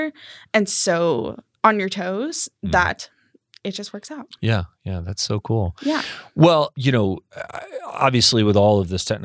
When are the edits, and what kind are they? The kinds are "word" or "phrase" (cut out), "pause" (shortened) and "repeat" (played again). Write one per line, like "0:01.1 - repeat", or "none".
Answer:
none